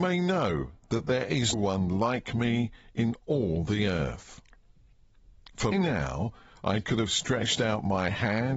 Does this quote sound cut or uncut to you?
cut